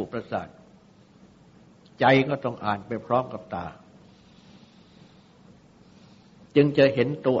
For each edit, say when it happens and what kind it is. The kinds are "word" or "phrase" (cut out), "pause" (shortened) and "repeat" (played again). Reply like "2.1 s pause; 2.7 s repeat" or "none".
6.5 s pause